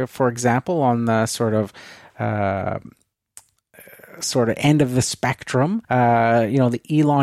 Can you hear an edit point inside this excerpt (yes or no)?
yes